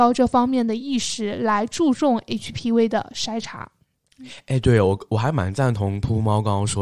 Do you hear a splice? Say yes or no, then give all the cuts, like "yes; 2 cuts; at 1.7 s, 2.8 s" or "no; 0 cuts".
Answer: no; 0 cuts